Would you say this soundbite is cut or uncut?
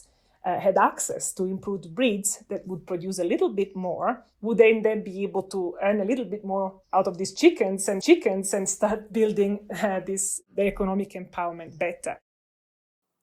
cut